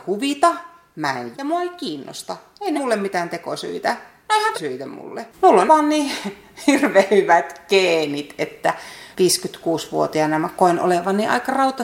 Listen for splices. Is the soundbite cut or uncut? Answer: cut